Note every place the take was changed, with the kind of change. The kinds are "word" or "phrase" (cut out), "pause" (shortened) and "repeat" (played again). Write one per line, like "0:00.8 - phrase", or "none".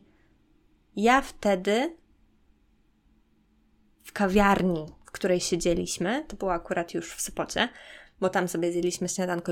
none